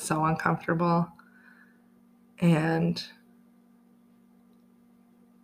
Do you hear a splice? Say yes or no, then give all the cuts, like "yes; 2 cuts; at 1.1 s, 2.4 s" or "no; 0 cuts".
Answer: no; 0 cuts